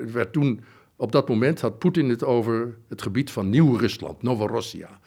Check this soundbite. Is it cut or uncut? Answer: uncut